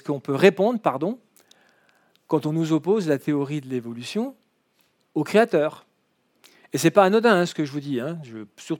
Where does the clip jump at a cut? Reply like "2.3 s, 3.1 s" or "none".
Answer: none